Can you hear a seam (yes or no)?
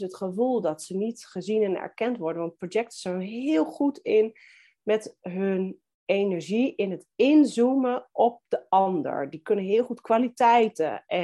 no